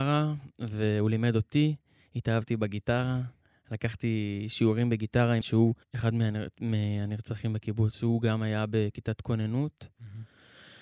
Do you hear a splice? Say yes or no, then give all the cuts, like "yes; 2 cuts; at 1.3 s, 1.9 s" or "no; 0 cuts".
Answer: yes; 2 cuts; at 5.4 s, 5.8 s